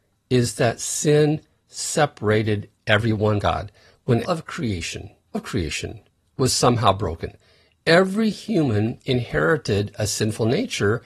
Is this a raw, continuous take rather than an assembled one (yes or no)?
no